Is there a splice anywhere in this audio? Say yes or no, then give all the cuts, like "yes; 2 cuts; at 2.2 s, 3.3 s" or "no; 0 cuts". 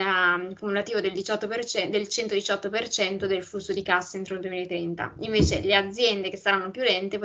no; 0 cuts